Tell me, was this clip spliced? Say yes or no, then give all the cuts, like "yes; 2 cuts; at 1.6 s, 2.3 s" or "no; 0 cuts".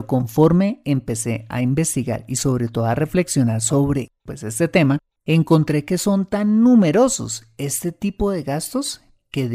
no; 0 cuts